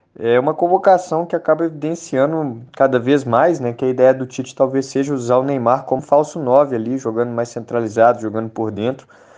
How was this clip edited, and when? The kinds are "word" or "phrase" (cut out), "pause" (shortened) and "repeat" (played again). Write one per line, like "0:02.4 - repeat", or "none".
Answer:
0:06.0 - word